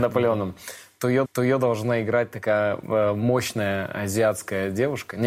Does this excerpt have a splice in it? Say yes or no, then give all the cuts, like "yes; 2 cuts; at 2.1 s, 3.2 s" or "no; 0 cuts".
yes; 1 cut; at 1.2 s